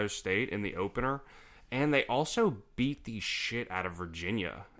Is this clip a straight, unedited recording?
yes; 0 cuts

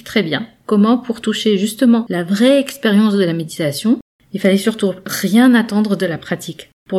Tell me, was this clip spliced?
no; 0 cuts

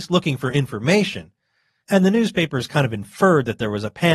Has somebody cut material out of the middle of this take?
no; 0 cuts

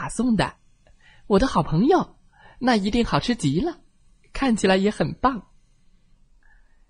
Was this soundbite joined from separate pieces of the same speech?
no; 0 cuts

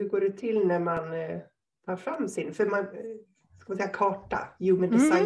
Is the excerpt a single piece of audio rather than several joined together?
yes; 0 cuts

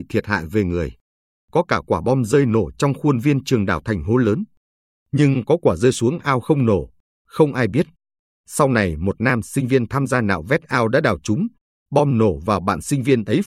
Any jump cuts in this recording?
no; 0 cuts

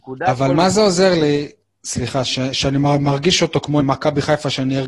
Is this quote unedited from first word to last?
no; 1 cut; at 3.8 s

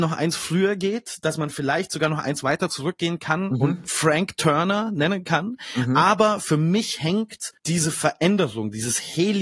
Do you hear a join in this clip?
yes; 1 cut; at 7.6 s

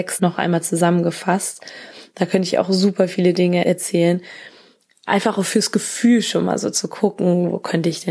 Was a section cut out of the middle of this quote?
no; 0 cuts

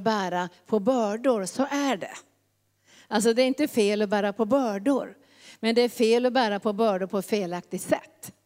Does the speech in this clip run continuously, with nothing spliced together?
yes; 0 cuts

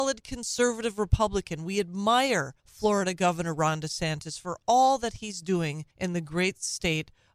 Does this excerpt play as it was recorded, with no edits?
no; 2 cuts; at 2.6 s, 5.9 s

